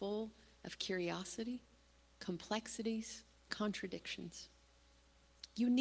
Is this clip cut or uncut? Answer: cut